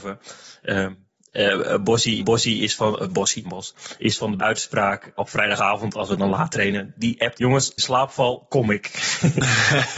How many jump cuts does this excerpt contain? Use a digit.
6